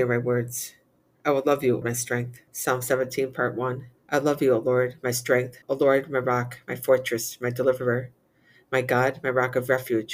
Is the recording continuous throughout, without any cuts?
no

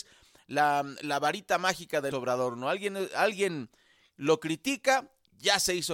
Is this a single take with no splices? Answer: no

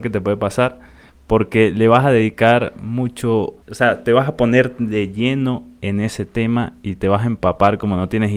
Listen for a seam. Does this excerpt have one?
yes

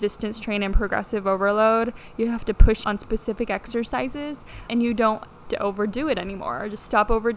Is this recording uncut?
no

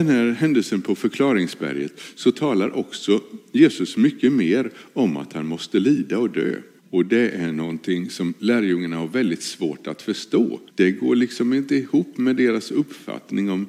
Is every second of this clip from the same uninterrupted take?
no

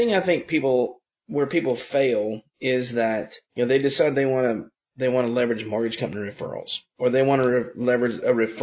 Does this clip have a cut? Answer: yes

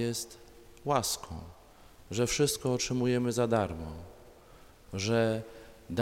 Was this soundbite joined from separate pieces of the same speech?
no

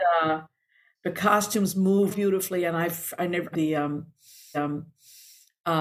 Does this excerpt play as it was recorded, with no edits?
no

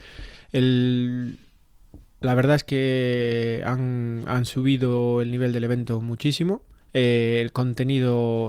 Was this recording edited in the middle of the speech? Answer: yes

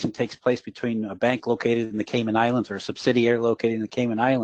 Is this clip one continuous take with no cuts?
yes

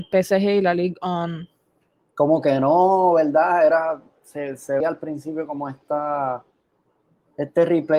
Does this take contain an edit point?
yes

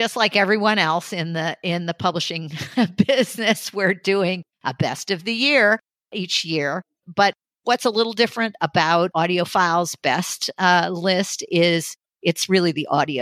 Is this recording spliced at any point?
no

